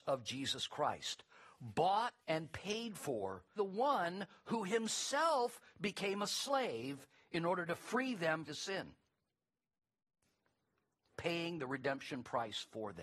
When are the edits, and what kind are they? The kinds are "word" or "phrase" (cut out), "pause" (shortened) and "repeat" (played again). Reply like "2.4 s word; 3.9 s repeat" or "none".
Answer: 2.2 s pause; 3.6 s word; 8.5 s phrase; 11.1 s word

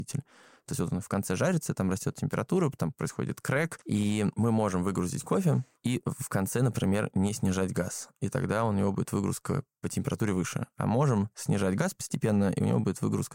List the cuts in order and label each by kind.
5.7 s pause

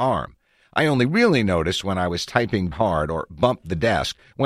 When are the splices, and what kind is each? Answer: 2.7 s word

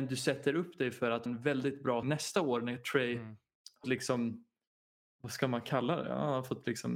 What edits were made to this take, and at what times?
1.3 s word; 2.0 s word; 3.8 s word

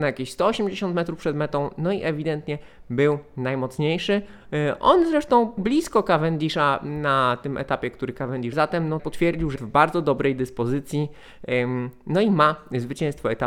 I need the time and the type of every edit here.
5.6 s word; 8.5 s word; 9.0 s word; 9.6 s word

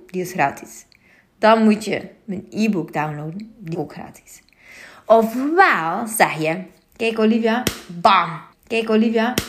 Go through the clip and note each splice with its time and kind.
3.7 s word; 8.5 s repeat

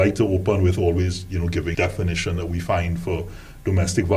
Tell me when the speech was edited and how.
1.7 s word

